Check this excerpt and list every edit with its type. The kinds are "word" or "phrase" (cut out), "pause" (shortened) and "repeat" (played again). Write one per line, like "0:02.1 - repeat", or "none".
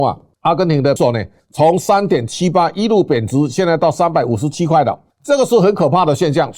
0:01.0 - word